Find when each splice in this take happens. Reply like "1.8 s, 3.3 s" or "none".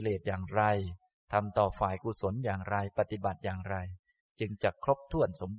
none